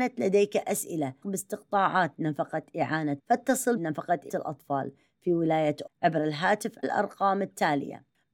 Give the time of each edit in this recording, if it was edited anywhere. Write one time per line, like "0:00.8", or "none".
0:01.2
0:03.2
0:03.8
0:04.3
0:05.9
0:06.8